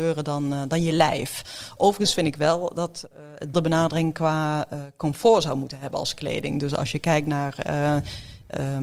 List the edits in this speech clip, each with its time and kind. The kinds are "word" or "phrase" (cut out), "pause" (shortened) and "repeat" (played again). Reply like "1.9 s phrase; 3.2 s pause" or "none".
3.5 s phrase